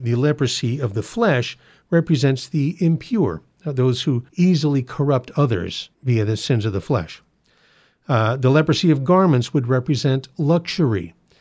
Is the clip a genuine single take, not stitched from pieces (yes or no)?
no